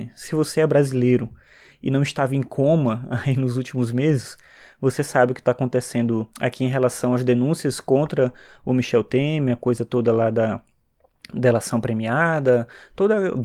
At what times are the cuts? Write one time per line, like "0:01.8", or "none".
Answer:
0:06.3